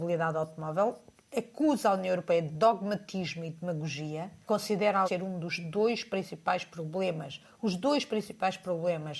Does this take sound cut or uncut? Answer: cut